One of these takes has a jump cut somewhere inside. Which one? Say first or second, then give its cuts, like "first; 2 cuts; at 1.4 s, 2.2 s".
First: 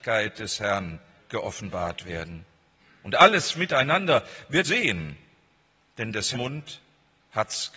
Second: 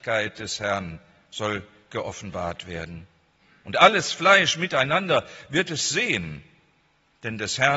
first; 4 cuts; at 1.2 s, 3.5 s, 4.6 s, 6.3 s